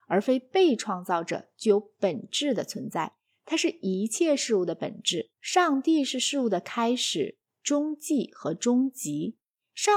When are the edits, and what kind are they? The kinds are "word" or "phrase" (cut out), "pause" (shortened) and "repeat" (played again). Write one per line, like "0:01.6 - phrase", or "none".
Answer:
0:05.3 - pause